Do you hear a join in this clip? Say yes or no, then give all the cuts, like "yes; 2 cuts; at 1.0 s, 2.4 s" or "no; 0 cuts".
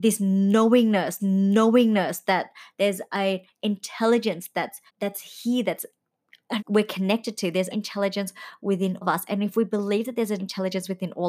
yes; 6 cuts; at 1.2 s, 4.9 s, 6.6 s, 7.7 s, 9.0 s, 10.4 s